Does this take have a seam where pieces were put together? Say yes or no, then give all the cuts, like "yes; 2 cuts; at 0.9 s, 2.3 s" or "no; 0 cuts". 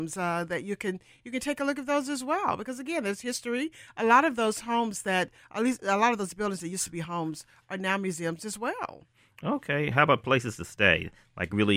no; 0 cuts